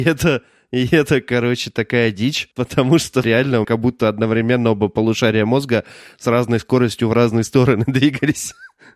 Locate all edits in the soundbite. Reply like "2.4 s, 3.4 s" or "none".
2.5 s, 3.2 s, 3.6 s